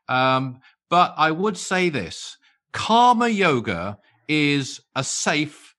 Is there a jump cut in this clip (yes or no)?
no